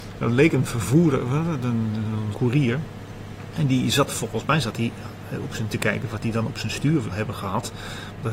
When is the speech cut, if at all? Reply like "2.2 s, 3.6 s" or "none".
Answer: 2.3 s, 5.7 s, 7.1 s